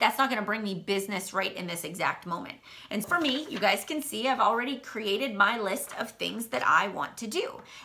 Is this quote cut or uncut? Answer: cut